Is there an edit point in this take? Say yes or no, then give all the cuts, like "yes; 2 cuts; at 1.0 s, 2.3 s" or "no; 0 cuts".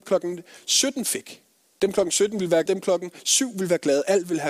yes; 2 cuts; at 1.6 s, 2.7 s